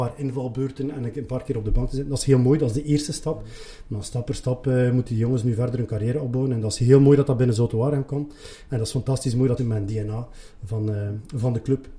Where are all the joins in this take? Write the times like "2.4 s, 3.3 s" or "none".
9.6 s